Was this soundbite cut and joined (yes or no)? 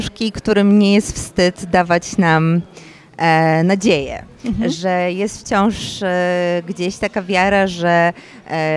no